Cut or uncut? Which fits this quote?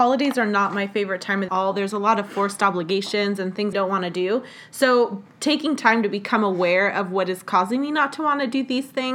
cut